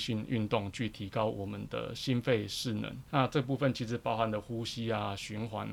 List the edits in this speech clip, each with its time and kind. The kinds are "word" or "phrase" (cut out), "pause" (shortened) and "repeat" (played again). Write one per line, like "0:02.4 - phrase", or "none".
0:03.1 - pause